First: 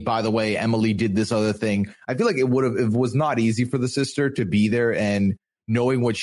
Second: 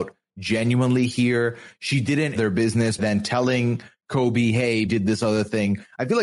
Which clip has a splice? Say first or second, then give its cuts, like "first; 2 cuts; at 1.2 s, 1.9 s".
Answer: second; 3 cuts; at 2.4 s, 3.0 s, 4.9 s